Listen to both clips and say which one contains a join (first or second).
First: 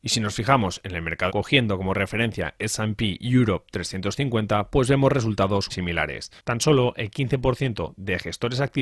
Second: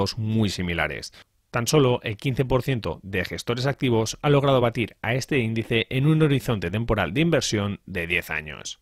first